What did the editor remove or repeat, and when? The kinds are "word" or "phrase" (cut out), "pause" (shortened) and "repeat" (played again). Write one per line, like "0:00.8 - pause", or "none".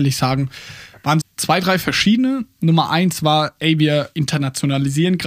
0:01.2 - word